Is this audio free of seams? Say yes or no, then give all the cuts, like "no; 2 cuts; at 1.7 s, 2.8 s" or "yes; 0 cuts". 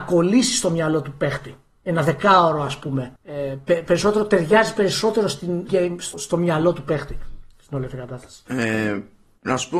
no; 3 cuts; at 3.2 s, 5.7 s, 6.1 s